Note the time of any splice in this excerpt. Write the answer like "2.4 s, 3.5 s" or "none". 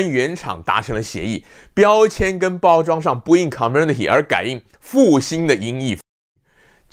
none